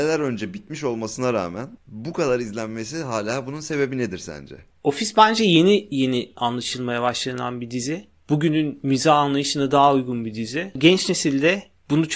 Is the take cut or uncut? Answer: uncut